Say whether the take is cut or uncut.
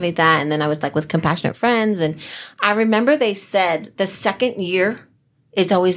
uncut